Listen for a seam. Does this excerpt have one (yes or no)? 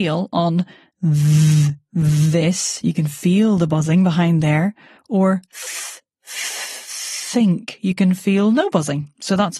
no